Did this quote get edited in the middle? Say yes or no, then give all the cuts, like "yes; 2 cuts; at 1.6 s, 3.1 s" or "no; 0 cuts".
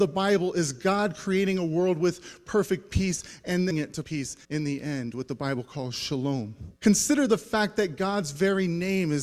yes; 4 cuts; at 3.7 s, 4.0 s, 4.4 s, 6.8 s